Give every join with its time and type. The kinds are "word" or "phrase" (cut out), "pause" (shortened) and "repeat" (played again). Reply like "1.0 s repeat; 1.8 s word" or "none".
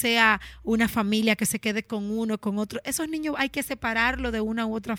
none

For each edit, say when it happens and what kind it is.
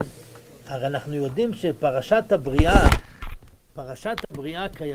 none

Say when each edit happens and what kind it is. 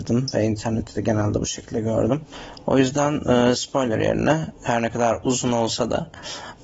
none

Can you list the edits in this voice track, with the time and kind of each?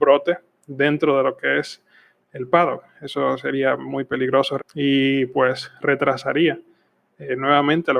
4.6 s word

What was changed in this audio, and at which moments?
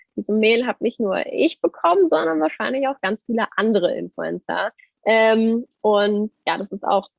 4.8 s pause

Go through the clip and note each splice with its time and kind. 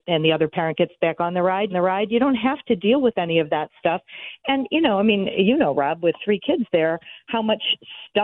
1.7 s repeat

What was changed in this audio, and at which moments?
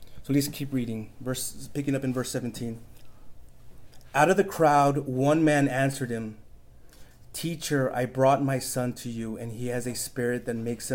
none

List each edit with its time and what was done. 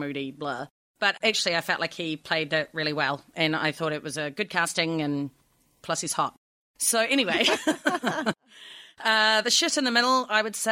none

